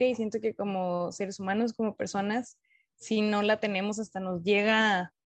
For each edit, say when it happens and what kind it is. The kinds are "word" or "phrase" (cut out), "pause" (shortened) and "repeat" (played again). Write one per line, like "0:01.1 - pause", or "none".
none